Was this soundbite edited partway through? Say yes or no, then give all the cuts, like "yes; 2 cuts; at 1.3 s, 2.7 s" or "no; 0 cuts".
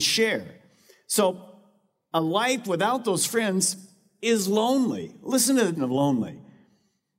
yes; 1 cut; at 5.7 s